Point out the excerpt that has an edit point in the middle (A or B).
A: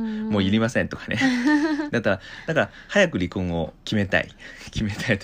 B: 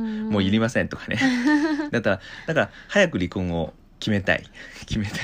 A